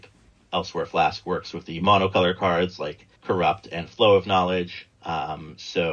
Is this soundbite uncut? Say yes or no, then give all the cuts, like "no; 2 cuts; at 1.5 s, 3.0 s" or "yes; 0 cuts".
no; 2 cuts; at 3.2 s, 4.9 s